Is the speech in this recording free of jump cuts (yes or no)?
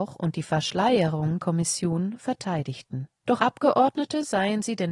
no